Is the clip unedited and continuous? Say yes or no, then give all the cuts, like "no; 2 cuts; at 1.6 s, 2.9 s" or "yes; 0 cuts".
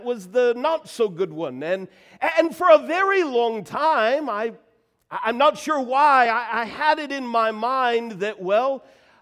yes; 0 cuts